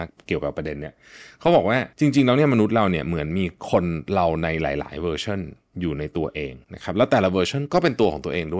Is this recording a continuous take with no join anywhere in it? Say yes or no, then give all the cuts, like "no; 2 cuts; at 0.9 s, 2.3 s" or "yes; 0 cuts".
no; 2 cuts; at 1.9 s, 6.6 s